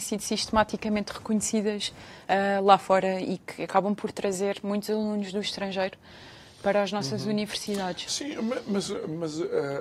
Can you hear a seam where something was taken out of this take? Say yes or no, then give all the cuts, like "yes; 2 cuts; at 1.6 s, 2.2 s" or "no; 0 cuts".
no; 0 cuts